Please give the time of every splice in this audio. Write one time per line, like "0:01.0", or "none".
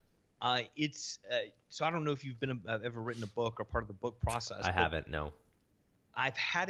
0:01.6